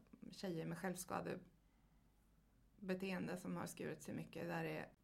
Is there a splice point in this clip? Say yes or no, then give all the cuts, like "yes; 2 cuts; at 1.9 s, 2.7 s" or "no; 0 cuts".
no; 0 cuts